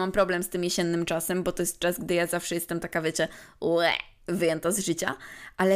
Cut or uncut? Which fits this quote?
uncut